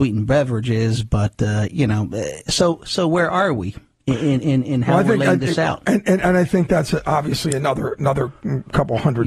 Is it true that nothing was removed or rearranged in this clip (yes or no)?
yes